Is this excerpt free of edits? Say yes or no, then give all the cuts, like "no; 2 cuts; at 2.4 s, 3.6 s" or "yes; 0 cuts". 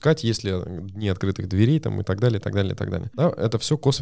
yes; 0 cuts